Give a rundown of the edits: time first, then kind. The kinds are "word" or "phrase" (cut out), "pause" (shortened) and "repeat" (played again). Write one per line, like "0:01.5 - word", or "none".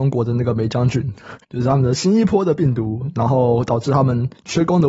0:01.4 - pause